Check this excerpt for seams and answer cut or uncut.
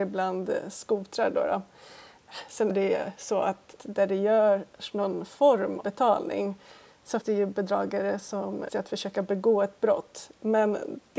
cut